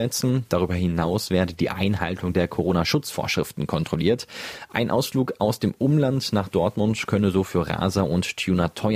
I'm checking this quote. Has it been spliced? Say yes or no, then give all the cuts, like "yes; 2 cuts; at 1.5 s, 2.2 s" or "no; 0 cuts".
no; 0 cuts